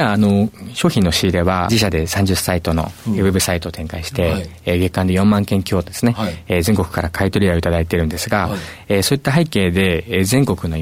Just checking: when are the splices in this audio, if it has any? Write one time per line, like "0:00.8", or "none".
0:01.7